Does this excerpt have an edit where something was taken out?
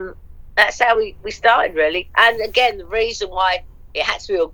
no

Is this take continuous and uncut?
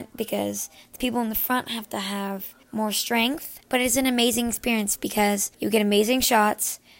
no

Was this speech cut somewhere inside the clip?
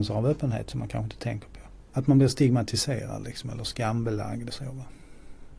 yes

